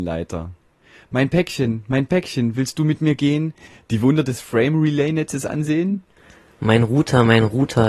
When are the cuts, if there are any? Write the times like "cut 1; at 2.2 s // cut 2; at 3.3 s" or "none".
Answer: none